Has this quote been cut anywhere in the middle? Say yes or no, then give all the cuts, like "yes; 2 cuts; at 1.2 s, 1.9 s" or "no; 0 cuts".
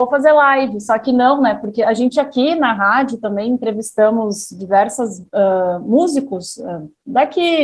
no; 0 cuts